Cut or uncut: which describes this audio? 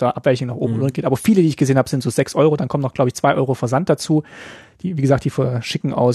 uncut